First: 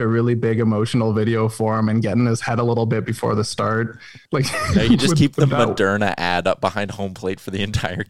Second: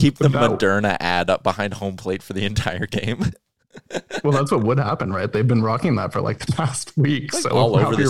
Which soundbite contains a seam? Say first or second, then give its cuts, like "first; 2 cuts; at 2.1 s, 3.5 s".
first; 1 cut; at 4.3 s